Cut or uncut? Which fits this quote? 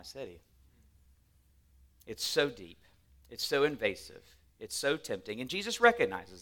uncut